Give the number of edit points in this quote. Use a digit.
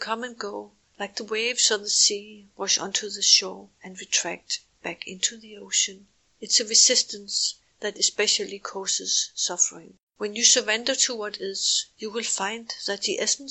3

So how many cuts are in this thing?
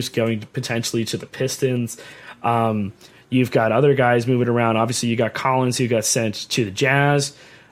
0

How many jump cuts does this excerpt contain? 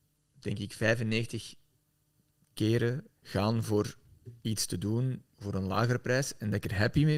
2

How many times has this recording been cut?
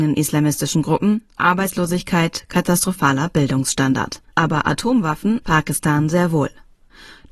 3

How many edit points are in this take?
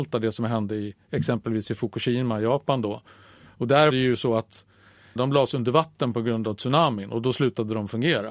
2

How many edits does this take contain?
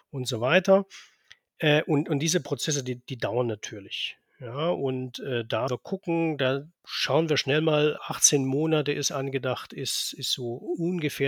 3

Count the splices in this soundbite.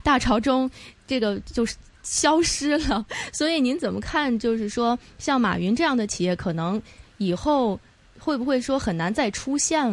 0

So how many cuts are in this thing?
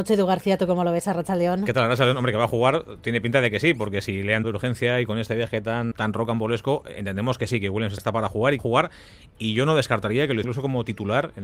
5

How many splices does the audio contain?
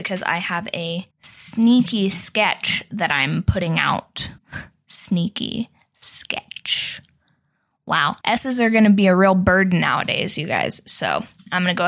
3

